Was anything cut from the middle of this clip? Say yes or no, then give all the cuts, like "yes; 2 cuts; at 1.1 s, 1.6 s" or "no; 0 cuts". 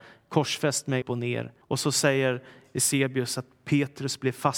yes; 2 cuts; at 1.0 s, 1.6 s